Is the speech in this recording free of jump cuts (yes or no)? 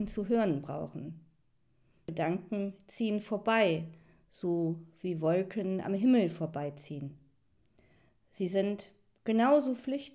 yes